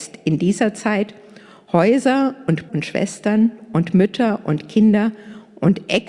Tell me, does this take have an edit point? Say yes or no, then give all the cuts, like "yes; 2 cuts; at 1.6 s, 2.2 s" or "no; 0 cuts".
yes; 1 cut; at 2.7 s